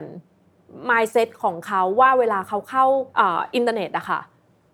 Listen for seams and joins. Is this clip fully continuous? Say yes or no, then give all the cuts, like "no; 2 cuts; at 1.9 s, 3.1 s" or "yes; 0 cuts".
no; 1 cut; at 3.1 s